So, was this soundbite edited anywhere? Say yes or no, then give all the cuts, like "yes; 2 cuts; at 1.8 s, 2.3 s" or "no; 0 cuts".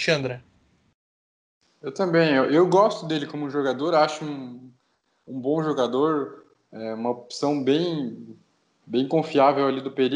no; 0 cuts